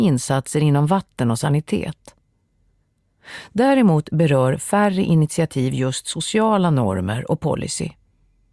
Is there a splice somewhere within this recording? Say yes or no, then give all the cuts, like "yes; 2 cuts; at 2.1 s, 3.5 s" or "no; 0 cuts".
no; 0 cuts